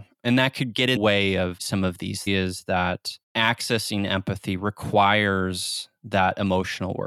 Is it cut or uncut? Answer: cut